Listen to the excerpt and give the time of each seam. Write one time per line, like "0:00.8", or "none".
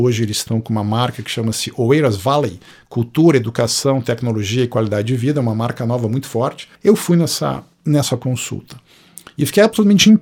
0:02.7
0:06.8